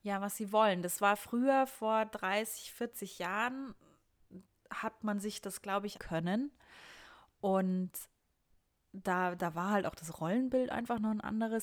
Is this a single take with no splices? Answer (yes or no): no